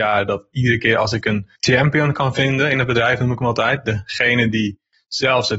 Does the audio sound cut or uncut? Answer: cut